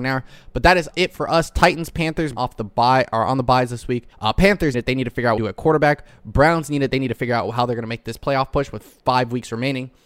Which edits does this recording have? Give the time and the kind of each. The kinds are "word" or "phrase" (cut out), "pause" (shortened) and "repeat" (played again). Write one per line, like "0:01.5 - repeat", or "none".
0:00.9 - word
0:02.4 - phrase
0:04.1 - pause
0:04.7 - word
0:05.4 - phrase

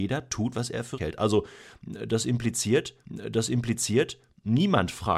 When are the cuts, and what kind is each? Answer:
0:01.0 - word
0:03.0 - repeat

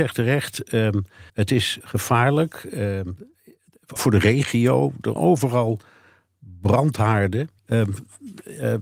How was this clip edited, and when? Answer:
0:01.3 - pause
0:01.8 - word
0:04.0 - word
0:05.2 - word
0:07.6 - pause

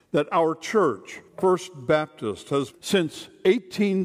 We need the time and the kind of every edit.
0:01.3 - pause
0:02.7 - word

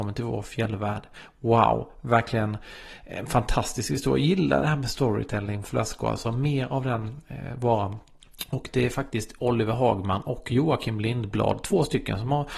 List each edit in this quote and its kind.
none

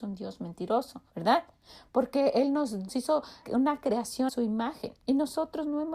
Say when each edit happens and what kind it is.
0:01.1 - pause
0:02.9 - word
0:03.4 - word
0:04.3 - word
0:05.0 - pause

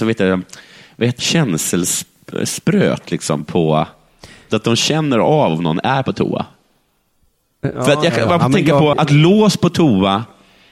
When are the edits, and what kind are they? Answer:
0:01.2 - word
0:08.9 - word

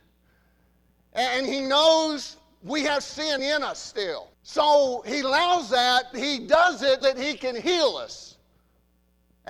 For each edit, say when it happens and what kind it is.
0:03.4 - word
0:04.3 - pause
0:06.1 - word
0:07.0 - word

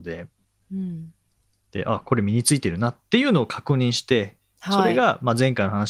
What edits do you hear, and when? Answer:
none

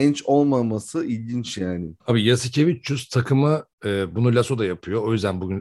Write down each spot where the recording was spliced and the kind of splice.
0:02.0 - pause
0:03.7 - pause

